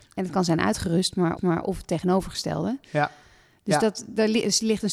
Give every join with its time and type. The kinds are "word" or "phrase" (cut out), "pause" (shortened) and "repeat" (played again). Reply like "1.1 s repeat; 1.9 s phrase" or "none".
1.4 s repeat

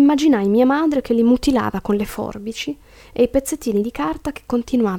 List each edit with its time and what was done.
none

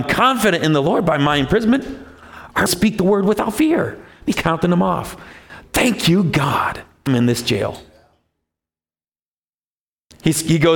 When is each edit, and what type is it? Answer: 2.7 s phrase; 4.3 s word; 7.1 s word

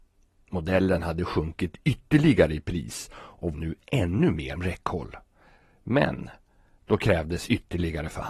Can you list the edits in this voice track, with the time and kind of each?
3.5 s word; 4.6 s word

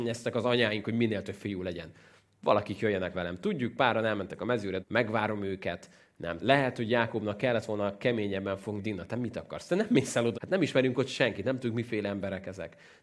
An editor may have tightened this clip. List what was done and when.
3.1 s word; 4.8 s word; 6.4 s word; 8.8 s word; 10.3 s word

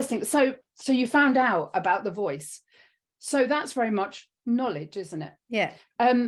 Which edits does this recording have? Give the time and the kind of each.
none

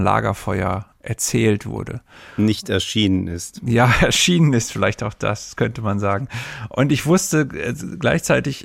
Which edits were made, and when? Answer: none

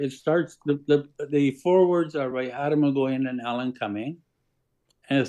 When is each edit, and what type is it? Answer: none

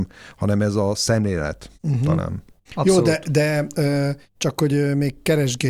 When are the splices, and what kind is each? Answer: 1.8 s pause; 2.6 s pause

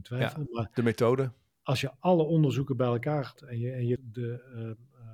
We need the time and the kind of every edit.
3.4 s word; 4.0 s word

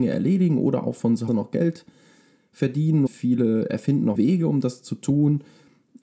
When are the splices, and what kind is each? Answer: 1.3 s word; 3.1 s word; 4.1 s word

